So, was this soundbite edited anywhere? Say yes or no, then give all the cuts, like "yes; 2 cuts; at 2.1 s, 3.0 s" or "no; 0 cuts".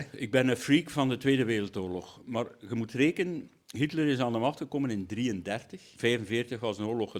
no; 0 cuts